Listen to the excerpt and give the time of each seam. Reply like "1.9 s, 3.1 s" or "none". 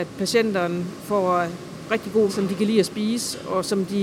2.3 s